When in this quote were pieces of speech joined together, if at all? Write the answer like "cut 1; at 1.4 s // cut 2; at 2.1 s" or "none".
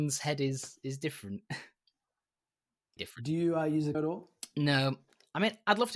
cut 1; at 3.0 s // cut 2; at 3.9 s